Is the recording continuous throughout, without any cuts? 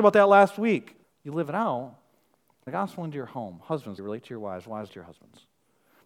no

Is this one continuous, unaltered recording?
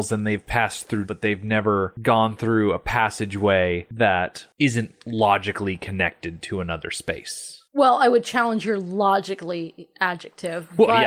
no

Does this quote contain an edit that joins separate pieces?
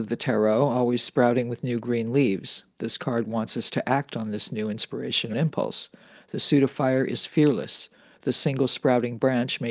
yes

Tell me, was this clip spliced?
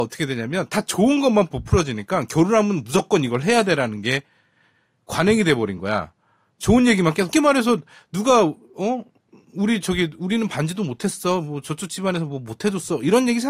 yes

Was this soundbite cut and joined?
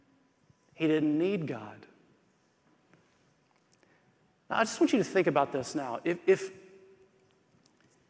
no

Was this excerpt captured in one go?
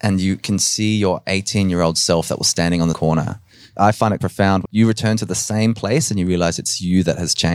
no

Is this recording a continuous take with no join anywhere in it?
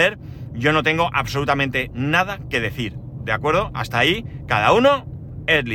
no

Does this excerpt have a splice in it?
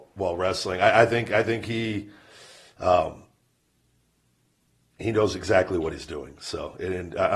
no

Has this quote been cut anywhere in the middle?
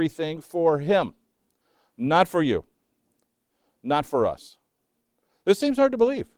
no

